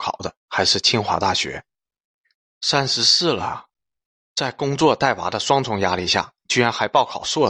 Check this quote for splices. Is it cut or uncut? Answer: uncut